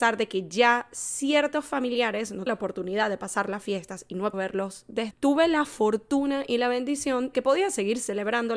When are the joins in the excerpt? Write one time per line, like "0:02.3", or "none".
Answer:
0:02.5
0:04.3
0:05.1
0:07.3